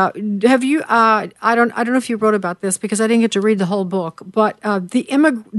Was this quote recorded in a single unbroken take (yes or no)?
yes